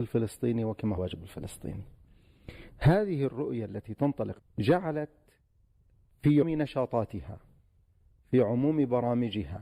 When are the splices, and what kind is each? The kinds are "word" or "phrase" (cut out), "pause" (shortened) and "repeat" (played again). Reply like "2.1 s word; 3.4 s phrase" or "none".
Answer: 1.0 s word; 4.4 s phrase; 6.4 s word